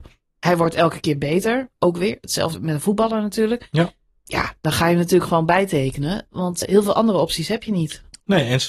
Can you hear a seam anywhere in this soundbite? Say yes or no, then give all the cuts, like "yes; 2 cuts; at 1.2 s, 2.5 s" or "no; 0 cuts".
yes; 2 cuts; at 2.5 s, 6.6 s